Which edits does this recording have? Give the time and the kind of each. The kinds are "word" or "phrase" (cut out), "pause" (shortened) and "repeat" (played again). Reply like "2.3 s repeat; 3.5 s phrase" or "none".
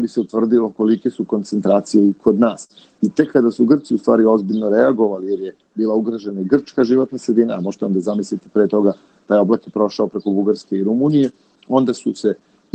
none